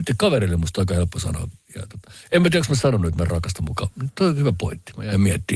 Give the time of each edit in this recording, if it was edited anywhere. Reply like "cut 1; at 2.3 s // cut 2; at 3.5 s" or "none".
none

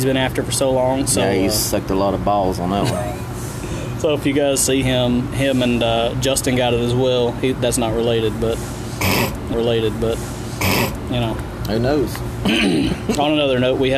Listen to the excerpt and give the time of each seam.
cut 1; at 4.8 s // cut 2; at 9.5 s

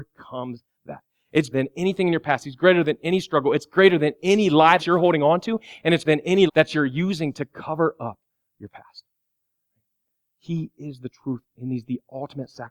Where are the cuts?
cut 1; at 1.5 s // cut 2; at 4.8 s // cut 3; at 6.0 s // cut 4; at 6.5 s

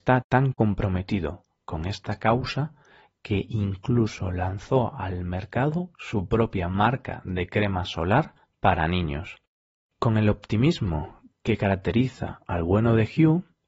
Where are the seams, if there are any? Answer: none

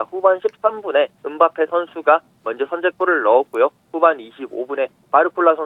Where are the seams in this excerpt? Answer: cut 1; at 1.1 s

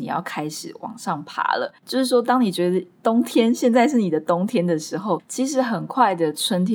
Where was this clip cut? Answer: cut 1; at 1.8 s

